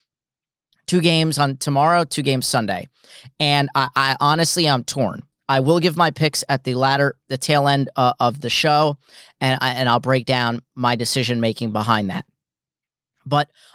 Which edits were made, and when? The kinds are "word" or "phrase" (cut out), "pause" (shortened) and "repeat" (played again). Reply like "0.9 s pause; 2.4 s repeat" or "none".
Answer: none